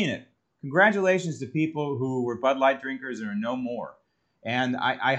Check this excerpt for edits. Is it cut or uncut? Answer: uncut